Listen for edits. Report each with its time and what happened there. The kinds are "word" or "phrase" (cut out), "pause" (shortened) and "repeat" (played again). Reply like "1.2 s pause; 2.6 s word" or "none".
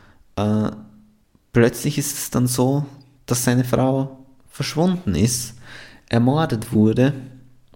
none